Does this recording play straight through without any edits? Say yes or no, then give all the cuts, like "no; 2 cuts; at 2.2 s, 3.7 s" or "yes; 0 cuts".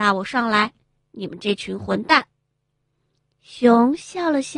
yes; 0 cuts